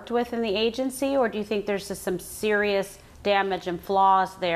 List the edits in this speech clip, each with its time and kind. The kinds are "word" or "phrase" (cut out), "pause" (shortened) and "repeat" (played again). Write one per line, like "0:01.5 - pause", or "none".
none